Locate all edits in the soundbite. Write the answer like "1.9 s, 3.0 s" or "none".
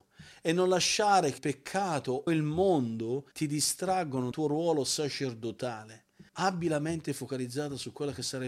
1.4 s, 2.3 s, 3.3 s, 4.3 s, 6.3 s